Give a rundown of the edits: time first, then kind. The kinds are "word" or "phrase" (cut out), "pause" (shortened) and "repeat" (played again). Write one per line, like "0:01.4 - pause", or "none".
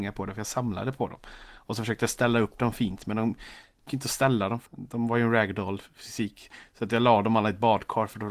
0:03.9 - word
0:04.7 - word